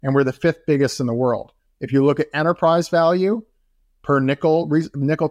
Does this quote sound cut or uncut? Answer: uncut